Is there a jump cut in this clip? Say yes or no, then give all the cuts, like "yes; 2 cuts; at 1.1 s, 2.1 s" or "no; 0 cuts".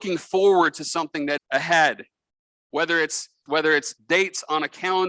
yes; 2 cuts; at 1.4 s, 3.5 s